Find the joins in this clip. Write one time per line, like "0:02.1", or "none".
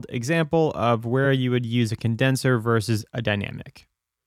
none